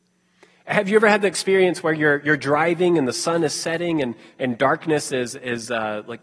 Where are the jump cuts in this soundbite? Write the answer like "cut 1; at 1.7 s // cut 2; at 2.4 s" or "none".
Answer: none